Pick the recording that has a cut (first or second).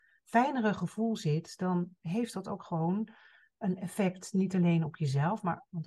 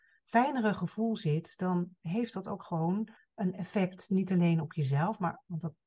second